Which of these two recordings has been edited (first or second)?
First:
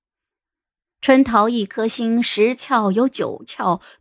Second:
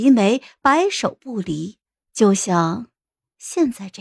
second